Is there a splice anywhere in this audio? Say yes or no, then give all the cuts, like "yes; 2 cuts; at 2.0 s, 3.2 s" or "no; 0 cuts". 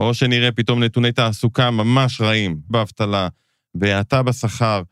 yes; 1 cut; at 2.7 s